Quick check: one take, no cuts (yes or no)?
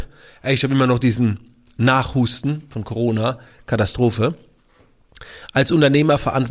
yes